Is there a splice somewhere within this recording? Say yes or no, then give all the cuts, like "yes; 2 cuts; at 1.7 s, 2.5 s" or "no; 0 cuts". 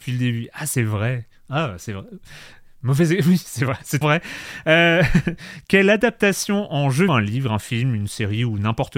yes; 2 cuts; at 4.0 s, 7.1 s